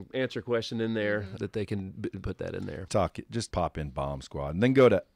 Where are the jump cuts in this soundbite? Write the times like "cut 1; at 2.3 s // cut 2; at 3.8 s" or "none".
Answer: cut 1; at 1.4 s // cut 2; at 2.2 s // cut 3; at 2.9 s // cut 4; at 3.5 s